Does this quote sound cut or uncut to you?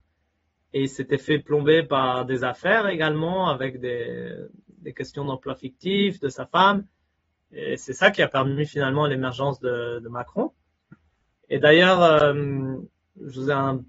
uncut